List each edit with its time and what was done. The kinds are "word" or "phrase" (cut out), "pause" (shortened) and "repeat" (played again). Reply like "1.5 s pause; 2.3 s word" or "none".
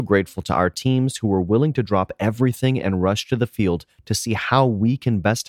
none